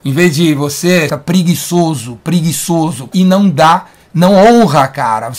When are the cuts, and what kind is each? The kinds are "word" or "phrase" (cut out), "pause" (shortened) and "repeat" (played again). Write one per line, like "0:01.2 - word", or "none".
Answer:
0:01.1 - phrase
0:03.1 - word